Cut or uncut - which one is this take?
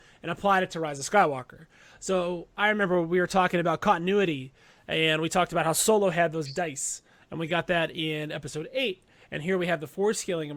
uncut